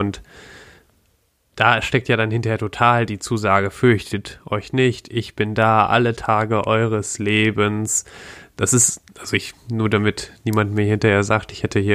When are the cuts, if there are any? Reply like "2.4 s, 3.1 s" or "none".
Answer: 9.1 s, 9.6 s